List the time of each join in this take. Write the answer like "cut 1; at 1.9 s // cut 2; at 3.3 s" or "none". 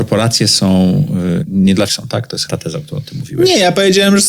cut 1; at 1.4 s // cut 2; at 1.9 s // cut 3; at 2.5 s

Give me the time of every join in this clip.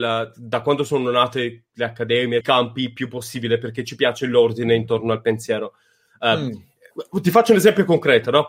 cut 1; at 2.4 s

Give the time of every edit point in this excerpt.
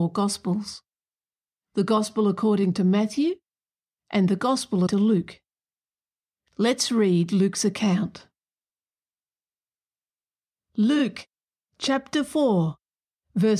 cut 1; at 4.9 s

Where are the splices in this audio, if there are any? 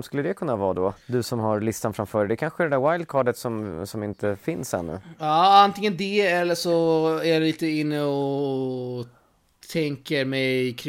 cut 1; at 1.0 s

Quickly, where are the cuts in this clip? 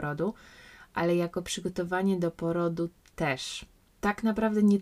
none

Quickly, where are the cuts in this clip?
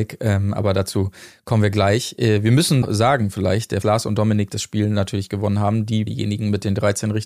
cut 1; at 2.8 s // cut 2; at 3.8 s // cut 3; at 6.1 s

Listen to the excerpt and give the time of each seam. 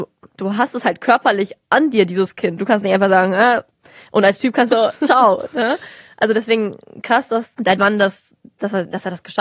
cut 1; at 4.7 s

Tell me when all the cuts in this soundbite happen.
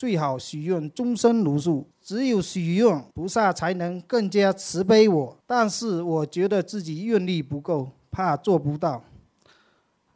cut 1; at 1.9 s // cut 2; at 3.1 s // cut 3; at 5.4 s

